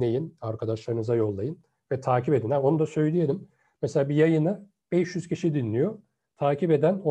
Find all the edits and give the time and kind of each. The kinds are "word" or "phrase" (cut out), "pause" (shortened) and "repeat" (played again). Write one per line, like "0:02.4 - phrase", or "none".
none